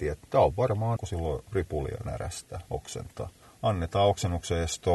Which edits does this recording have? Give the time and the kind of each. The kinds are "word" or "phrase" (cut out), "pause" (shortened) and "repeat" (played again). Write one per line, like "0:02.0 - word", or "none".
0:01.0 - word
0:03.4 - pause